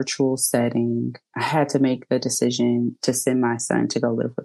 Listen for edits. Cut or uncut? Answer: cut